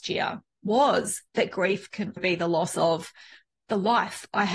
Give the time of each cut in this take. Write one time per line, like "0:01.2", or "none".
0:02.2